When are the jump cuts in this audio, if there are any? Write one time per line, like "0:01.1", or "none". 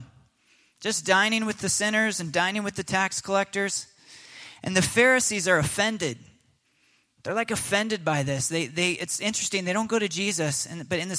none